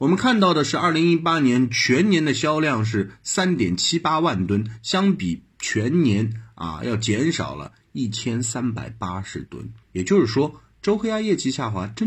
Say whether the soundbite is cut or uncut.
cut